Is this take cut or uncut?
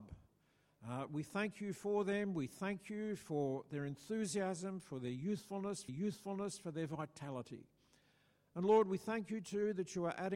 cut